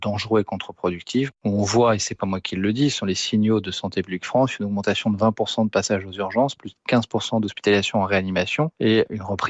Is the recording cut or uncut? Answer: uncut